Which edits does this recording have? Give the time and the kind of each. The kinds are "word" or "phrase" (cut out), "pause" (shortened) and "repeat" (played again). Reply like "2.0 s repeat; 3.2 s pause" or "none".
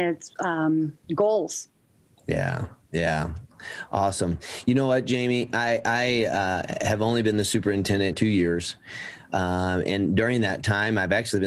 1.0 s pause; 8.1 s phrase